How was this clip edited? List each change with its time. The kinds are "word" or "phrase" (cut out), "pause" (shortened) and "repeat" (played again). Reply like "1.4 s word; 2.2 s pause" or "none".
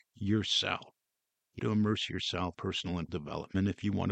1.6 s word; 2.5 s word; 3.1 s word